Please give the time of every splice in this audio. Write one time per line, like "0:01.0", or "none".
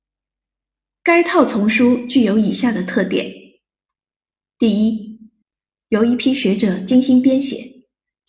none